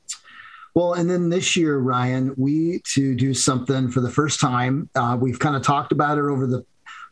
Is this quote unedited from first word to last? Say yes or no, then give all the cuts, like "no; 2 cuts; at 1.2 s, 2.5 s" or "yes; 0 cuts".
no; 1 cut; at 2.8 s